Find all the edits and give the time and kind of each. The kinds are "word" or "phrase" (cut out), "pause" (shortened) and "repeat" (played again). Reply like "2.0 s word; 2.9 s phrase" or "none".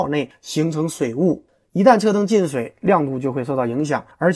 none